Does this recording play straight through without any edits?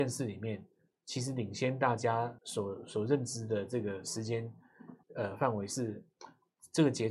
no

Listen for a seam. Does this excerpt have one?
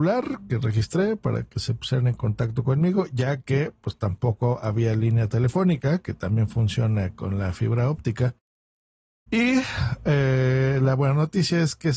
no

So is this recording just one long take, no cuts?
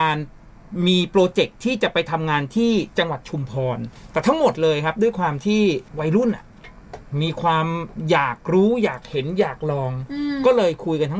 no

